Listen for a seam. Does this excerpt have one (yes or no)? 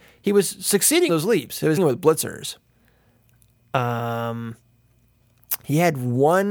yes